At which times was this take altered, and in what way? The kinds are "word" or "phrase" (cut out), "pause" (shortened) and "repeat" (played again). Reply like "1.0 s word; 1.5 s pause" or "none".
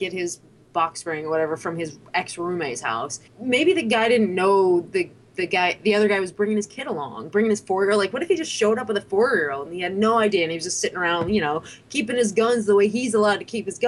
3.3 s pause